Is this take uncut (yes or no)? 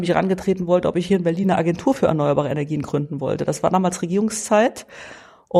yes